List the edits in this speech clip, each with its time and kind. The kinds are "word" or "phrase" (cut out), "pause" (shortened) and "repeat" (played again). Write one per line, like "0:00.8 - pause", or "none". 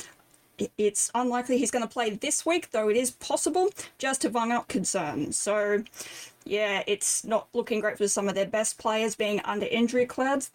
0:04.7 - phrase
0:08.0 - phrase